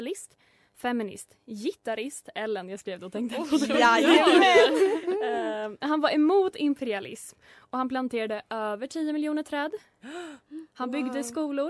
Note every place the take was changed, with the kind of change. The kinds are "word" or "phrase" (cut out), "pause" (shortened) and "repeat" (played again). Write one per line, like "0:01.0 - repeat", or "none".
none